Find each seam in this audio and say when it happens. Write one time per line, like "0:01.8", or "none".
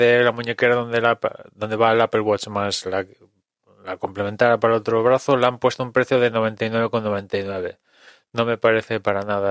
none